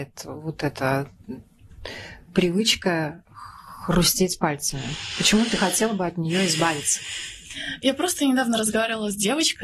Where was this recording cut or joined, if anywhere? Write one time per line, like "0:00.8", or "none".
none